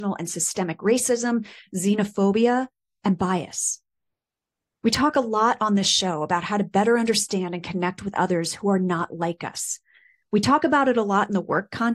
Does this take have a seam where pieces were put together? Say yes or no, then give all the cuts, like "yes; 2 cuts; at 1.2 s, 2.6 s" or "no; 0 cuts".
no; 0 cuts